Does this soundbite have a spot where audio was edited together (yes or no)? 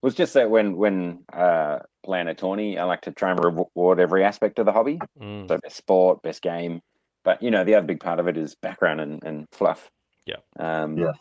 yes